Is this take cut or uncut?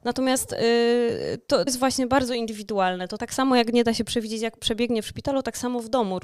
cut